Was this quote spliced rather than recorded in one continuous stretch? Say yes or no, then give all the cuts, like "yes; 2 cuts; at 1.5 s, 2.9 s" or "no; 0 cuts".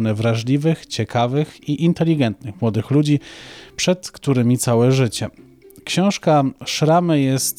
no; 0 cuts